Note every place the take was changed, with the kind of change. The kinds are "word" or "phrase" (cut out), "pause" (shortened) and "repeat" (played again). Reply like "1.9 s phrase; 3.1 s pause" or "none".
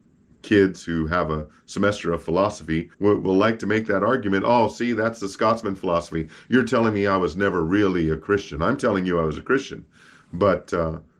2.9 s pause